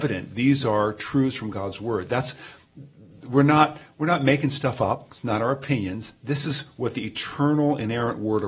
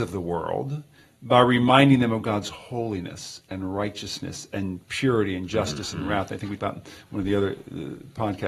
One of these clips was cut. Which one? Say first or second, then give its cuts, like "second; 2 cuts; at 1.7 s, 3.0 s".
second; 2 cuts; at 4.8 s, 6.6 s